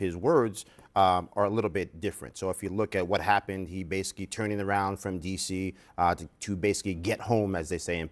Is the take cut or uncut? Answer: uncut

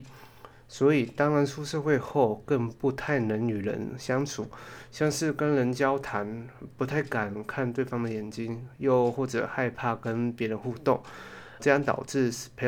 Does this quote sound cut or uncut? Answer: cut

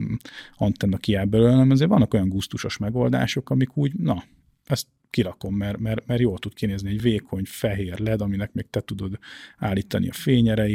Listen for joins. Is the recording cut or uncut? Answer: uncut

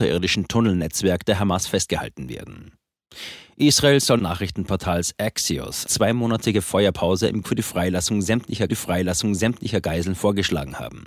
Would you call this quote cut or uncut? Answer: cut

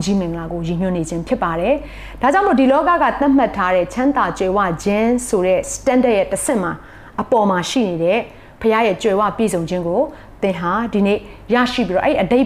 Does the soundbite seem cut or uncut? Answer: uncut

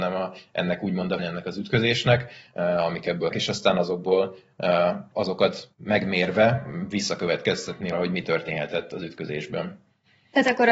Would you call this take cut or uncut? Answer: cut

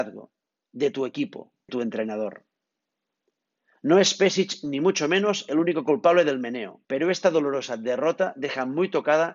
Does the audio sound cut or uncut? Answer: cut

